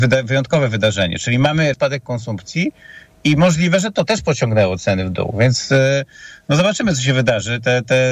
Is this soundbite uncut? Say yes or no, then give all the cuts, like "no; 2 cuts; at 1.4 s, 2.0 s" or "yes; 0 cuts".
no; 1 cut; at 1.7 s